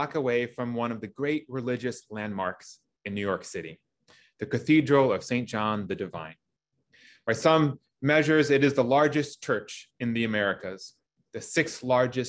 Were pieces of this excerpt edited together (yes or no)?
no